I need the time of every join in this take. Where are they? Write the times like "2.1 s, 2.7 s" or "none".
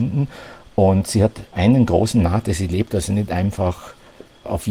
none

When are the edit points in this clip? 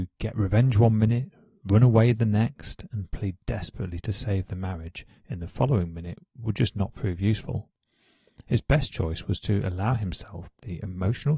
none

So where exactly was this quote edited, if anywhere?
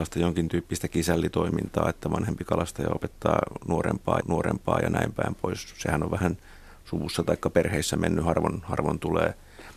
4.2 s

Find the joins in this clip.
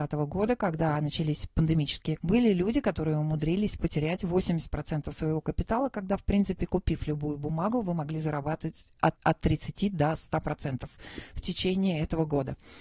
2.2 s, 9.2 s

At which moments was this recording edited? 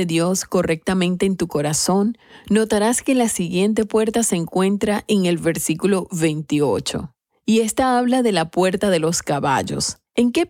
none

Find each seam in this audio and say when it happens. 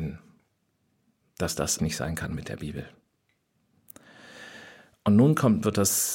1.8 s

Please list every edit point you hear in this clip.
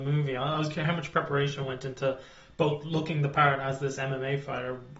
none

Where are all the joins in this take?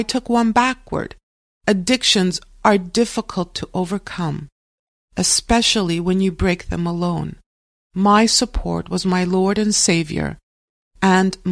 none

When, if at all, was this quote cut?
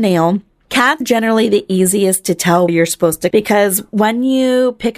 1.0 s, 2.7 s, 3.3 s

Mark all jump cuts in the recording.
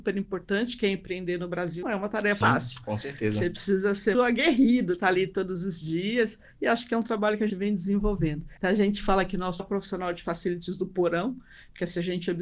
1.8 s, 2.4 s, 4.1 s, 7.5 s, 8.6 s, 9.6 s

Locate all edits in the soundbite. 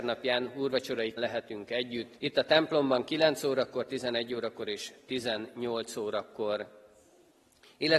1.2 s, 2.2 s

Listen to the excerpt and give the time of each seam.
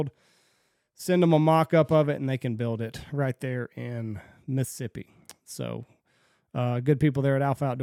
none

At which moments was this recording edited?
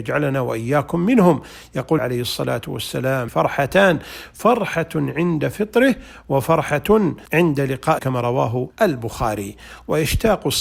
2.0 s, 3.3 s, 7.3 s, 8.0 s, 8.7 s

